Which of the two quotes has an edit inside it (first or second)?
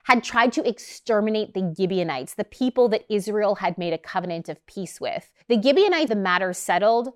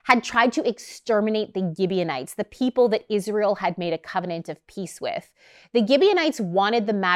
first